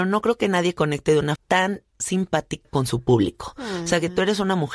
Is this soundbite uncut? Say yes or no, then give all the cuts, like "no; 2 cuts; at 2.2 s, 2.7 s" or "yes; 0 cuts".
no; 2 cuts; at 1.4 s, 2.6 s